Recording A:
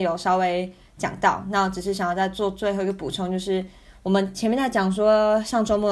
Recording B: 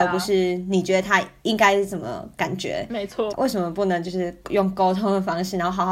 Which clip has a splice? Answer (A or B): B